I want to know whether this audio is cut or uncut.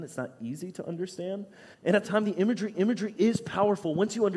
cut